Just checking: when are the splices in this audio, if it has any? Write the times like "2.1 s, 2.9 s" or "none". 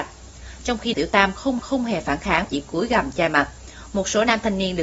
0.9 s, 1.6 s, 2.4 s